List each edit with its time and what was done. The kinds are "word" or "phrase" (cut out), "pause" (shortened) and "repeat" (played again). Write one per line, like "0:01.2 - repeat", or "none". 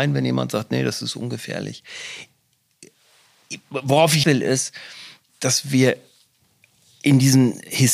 0:04.2 - word
0:05.3 - word